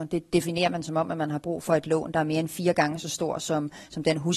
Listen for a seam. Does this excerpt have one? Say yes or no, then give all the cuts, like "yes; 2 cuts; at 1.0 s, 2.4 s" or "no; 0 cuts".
no; 0 cuts